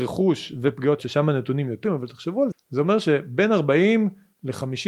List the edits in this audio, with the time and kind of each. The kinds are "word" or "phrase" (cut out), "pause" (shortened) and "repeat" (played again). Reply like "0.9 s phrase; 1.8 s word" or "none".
1.0 s word; 1.8 s word; 2.5 s word